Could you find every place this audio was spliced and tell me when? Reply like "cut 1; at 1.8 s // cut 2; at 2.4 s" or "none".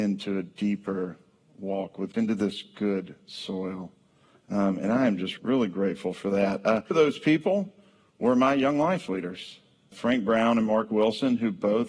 cut 1; at 2.1 s // cut 2; at 5.4 s // cut 3; at 6.9 s // cut 4; at 9.9 s